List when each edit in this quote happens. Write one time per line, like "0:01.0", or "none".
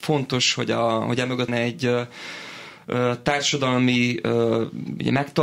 0:01.5